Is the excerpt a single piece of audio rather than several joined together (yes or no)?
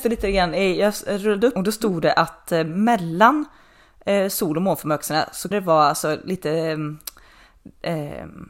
no